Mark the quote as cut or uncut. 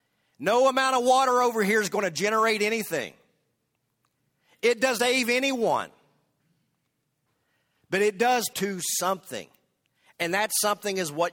cut